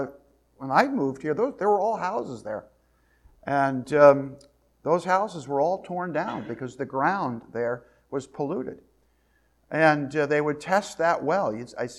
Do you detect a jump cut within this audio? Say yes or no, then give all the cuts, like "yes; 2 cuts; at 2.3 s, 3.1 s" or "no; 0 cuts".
no; 0 cuts